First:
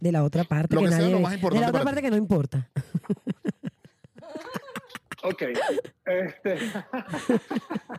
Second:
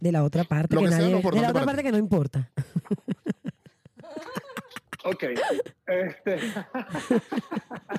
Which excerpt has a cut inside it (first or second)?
second